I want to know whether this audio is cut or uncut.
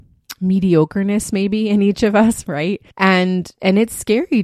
cut